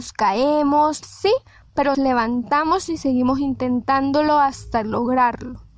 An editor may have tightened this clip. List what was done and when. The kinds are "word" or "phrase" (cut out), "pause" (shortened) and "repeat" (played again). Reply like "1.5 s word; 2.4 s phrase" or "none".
1.0 s phrase; 1.9 s word